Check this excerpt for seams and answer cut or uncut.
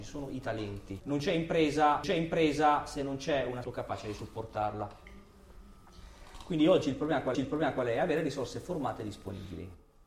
cut